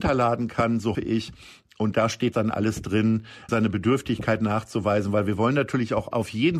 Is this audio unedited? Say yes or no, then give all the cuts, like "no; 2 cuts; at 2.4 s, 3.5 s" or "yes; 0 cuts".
no; 3 cuts; at 0.9 s, 2.3 s, 3.5 s